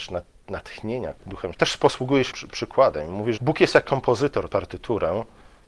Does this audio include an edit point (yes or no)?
yes